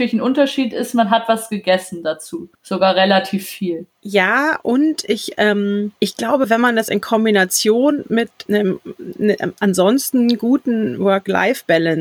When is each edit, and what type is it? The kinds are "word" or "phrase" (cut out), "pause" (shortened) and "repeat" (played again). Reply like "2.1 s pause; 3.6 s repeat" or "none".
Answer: 2.5 s pause; 3.9 s pause; 6.0 s pause; 8.5 s word